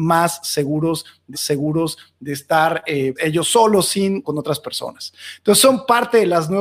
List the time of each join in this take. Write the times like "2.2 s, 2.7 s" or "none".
1.3 s, 3.2 s, 4.2 s